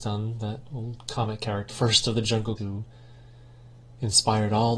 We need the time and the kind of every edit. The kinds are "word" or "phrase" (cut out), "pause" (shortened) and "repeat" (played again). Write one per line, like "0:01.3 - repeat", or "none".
0:01.7 - word
0:02.6 - word